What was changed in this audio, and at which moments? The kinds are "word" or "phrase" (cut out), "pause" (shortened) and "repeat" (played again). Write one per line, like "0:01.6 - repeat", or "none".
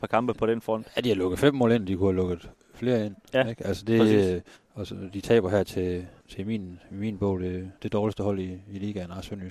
0:04.5 - pause
0:06.2 - pause
0:07.8 - pause